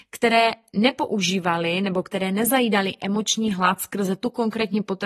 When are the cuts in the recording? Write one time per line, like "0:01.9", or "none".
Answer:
none